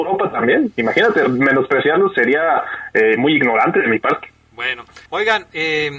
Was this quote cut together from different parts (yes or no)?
yes